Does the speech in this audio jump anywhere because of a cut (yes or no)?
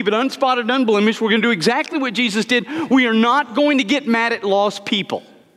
no